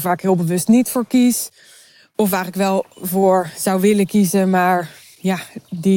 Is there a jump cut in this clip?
no; 0 cuts

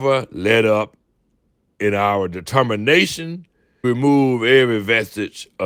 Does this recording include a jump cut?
yes; 1 cut; at 3.8 s

